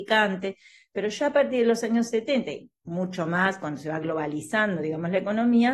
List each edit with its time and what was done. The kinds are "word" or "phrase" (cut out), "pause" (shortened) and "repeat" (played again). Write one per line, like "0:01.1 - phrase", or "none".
none